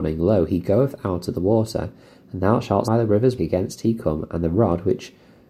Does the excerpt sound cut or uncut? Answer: cut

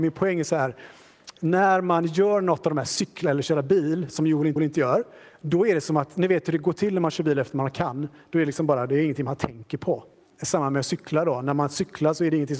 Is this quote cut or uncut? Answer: cut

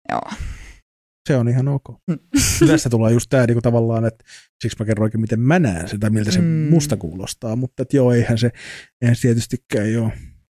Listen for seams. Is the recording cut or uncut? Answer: uncut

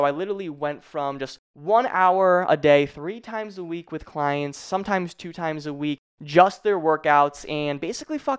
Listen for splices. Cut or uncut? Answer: uncut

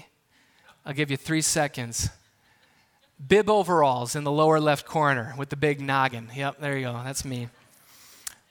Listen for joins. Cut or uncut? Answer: uncut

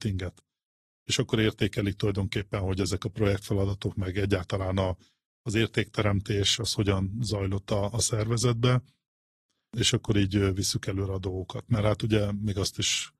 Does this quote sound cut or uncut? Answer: uncut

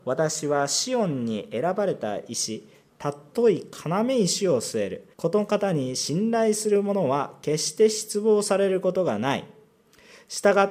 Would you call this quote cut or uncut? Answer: cut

